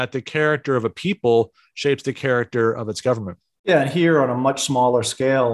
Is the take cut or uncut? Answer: uncut